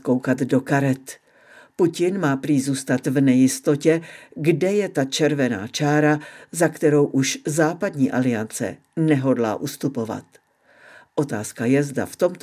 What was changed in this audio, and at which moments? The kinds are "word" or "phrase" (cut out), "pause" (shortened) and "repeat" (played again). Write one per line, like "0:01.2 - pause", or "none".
none